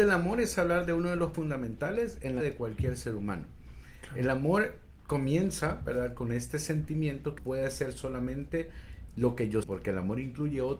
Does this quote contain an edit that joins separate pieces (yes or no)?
yes